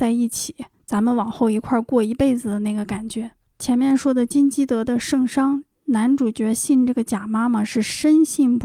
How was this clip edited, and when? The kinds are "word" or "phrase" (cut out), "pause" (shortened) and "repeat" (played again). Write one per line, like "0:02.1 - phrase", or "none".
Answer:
none